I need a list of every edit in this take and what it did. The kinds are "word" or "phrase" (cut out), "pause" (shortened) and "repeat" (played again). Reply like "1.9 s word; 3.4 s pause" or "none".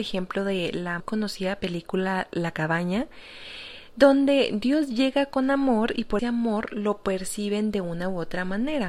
1.0 s word; 6.2 s word